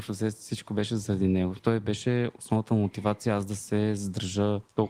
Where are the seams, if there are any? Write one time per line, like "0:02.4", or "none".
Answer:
0:01.6